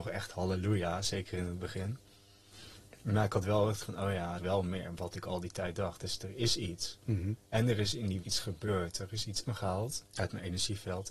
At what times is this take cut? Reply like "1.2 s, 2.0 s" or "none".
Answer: 3.8 s, 4.4 s, 7.5 s, 8.2 s, 9.5 s, 10.1 s